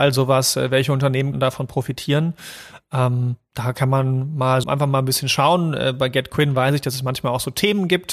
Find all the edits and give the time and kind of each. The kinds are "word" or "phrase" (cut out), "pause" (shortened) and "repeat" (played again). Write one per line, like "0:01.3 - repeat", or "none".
0:01.3 - word
0:04.6 - word